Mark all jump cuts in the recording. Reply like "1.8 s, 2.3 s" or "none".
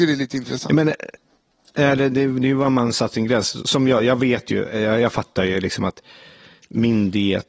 none

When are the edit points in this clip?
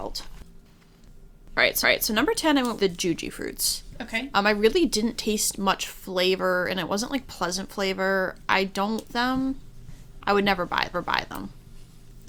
1.8 s, 2.8 s, 9.1 s, 10.9 s

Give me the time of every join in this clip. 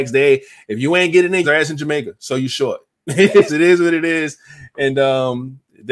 1.4 s, 3.5 s

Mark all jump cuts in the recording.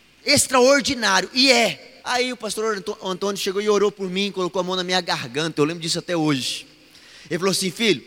2.0 s

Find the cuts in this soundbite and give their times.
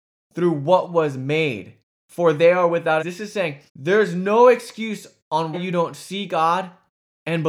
1.8 s, 3.0 s, 3.7 s, 5.5 s

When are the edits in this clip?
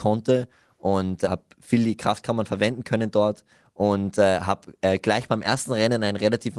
none

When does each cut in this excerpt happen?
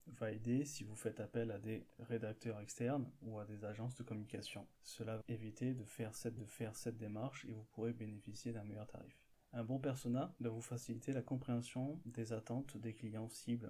4.7 s, 5.2 s, 6.4 s

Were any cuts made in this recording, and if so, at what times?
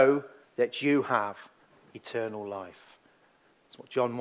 none

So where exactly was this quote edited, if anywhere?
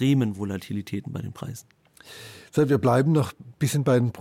none

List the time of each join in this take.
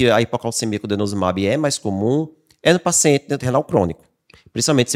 3.4 s

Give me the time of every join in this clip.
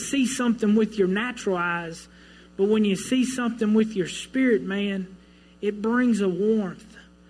none

